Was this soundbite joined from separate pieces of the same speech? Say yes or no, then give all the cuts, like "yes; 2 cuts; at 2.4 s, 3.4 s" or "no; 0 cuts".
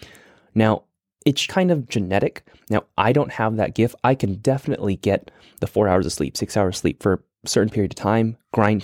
yes; 1 cut; at 1.5 s